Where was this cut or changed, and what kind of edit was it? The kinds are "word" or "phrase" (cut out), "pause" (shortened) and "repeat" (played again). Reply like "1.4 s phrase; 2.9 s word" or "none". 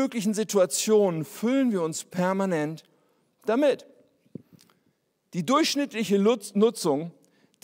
none